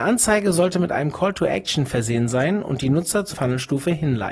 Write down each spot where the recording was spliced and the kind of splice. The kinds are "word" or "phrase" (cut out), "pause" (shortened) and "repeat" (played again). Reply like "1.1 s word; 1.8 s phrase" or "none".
3.3 s word